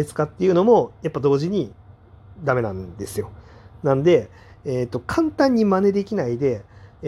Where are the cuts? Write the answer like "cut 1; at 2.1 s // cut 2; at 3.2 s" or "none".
none